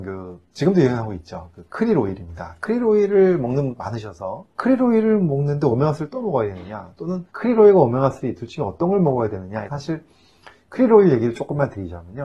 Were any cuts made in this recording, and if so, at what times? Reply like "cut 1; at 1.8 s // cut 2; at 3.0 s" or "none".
cut 1; at 3.7 s // cut 2; at 4.5 s // cut 3; at 7.3 s // cut 4; at 9.7 s